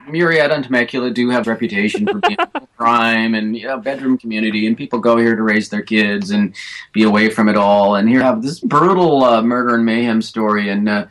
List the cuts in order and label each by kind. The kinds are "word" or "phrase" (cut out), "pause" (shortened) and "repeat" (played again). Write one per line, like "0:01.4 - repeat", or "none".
0:01.4 - word
0:08.2 - word
0:08.6 - word